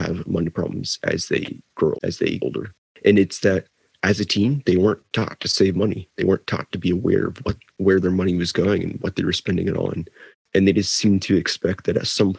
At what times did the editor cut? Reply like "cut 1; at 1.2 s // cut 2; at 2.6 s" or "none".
cut 1; at 1.9 s // cut 2; at 2.4 s